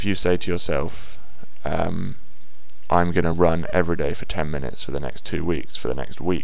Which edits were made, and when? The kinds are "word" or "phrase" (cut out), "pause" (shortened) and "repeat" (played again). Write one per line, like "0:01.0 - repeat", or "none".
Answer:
none

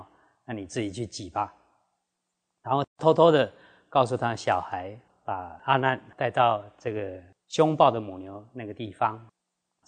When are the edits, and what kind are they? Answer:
0:05.1 - word

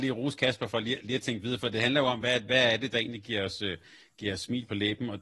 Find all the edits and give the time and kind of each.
none

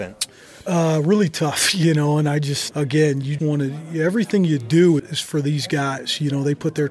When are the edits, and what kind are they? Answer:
0:02.7 - word
0:03.4 - word
0:05.0 - word

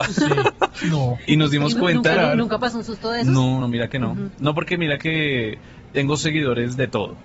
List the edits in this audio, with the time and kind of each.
0:03.6 - word

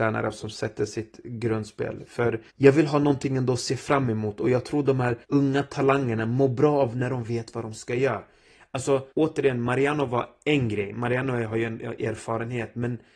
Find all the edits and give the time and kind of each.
0:02.5 - pause
0:05.2 - pause
0:09.1 - pause

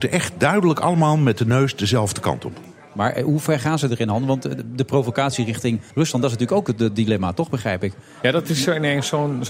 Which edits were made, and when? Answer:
0:05.9 - pause

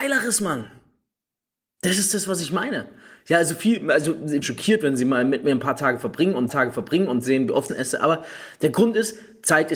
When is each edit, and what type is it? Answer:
0:04.4 - phrase
0:06.5 - repeat
0:07.7 - phrase

